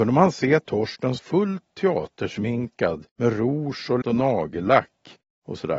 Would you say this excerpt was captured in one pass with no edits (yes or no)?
no